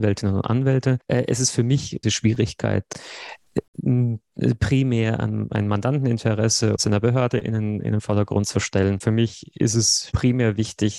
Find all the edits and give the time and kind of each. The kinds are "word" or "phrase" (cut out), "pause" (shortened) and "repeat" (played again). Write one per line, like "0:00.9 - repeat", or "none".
0:02.0 - phrase
0:06.8 - phrase